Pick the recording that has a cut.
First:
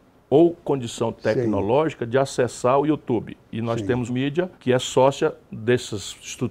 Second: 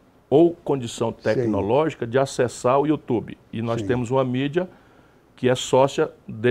first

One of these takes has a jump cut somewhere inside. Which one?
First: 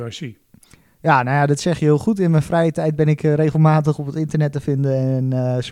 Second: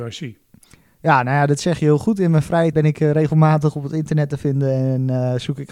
second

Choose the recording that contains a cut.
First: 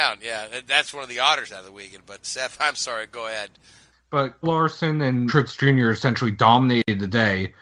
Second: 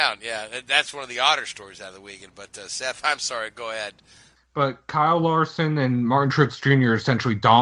first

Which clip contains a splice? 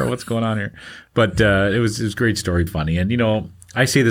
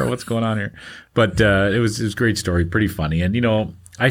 first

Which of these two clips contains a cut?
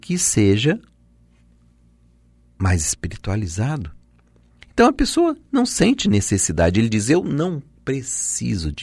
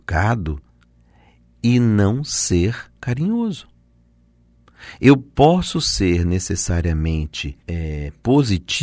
second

